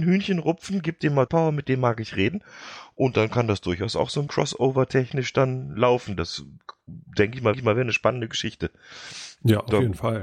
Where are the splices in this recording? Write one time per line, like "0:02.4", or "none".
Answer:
0:01.3
0:04.3
0:07.5